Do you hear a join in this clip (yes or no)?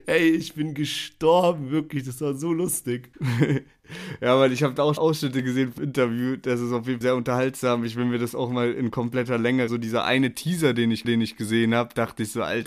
yes